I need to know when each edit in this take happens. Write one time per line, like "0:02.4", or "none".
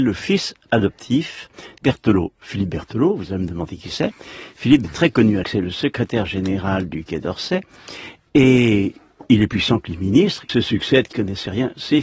0:01.8
0:04.8
0:05.4
0:09.5
0:10.5
0:11.1

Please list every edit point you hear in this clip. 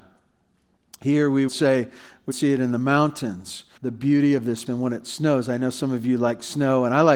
0:01.5
0:02.3
0:03.8
0:04.7

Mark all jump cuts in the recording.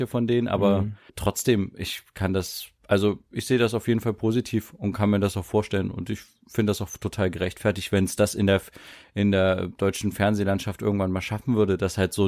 0:01.1
0:02.8

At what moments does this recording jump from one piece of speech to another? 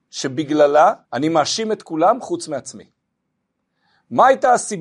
0:01.0

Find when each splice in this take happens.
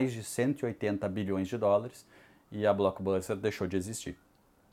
none

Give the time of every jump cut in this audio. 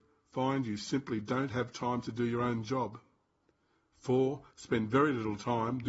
none

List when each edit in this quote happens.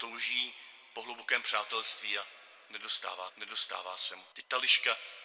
0:03.3
0:04.3

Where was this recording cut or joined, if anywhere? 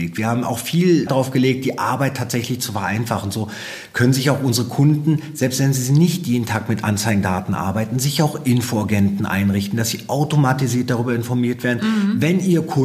0:01.1

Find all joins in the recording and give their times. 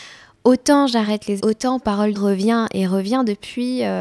0:01.4
0:02.1

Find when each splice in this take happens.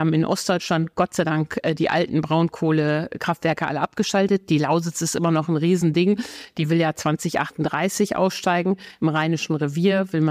none

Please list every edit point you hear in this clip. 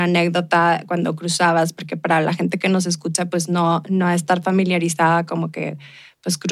none

